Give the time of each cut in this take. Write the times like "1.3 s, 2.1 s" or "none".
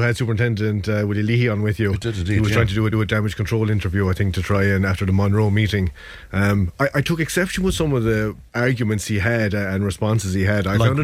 2.9 s, 8.5 s